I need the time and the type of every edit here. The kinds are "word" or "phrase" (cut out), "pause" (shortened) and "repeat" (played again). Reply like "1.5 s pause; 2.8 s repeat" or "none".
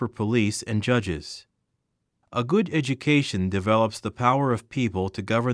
none